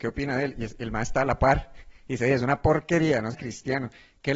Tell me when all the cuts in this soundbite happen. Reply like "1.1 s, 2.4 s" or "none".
1.9 s, 3.3 s